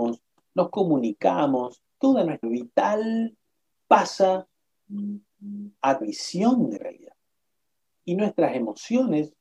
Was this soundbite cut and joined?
yes; 5 cuts; at 1.9 s, 2.4 s, 3.7 s, 6.0 s, 6.8 s

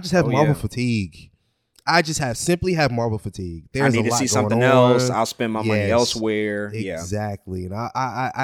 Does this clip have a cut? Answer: no; 0 cuts

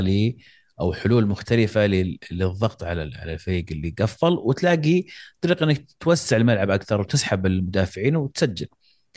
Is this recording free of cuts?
yes; 0 cuts

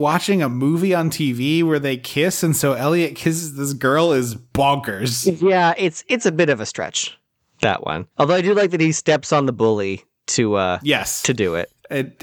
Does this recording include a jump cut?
yes; 1 cut; at 8.1 s

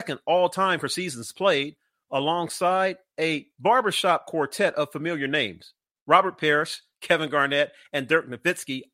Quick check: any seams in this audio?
no; 0 cuts

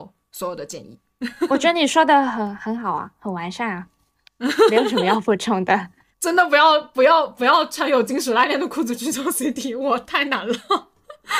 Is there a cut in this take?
yes; 1 cut; at 6.1 s

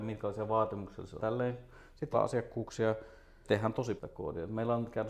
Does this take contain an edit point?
yes; 4 cuts; at 1.2 s, 2.1 s, 3.4 s, 4.0 s

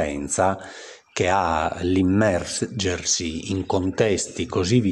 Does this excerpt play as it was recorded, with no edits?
yes; 0 cuts

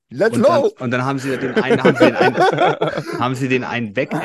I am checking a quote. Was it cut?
no; 0 cuts

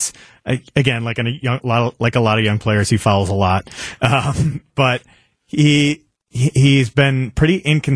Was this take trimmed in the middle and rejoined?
no; 0 cuts

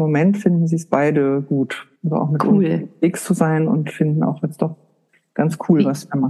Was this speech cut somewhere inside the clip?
yes; 1 cut; at 2.0 s

